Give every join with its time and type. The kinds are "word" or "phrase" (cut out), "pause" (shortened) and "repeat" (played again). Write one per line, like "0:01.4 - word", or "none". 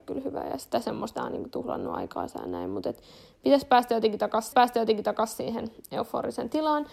0:01.1 - phrase
0:04.5 - repeat